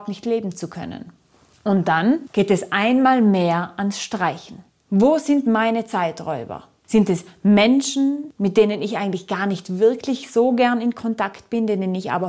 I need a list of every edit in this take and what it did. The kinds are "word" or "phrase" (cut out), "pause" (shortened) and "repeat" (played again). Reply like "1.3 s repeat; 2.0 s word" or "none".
none